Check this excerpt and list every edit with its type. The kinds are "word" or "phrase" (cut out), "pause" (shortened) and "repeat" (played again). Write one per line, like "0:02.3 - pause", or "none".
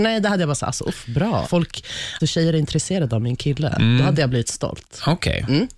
0:01.4 - word
0:02.2 - word